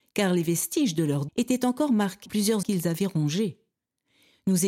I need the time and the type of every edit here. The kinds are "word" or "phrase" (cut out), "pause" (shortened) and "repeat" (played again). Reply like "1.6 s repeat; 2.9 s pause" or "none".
1.3 s word; 2.3 s word; 2.6 s word